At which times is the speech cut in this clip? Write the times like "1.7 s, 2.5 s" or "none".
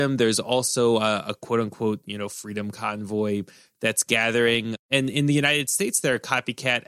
none